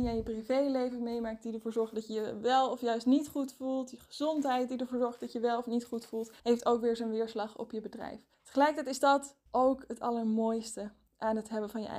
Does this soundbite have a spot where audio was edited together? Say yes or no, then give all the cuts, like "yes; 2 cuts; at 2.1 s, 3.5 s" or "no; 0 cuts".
yes; 3 cuts; at 6.4 s, 8.3 s, 9.5 s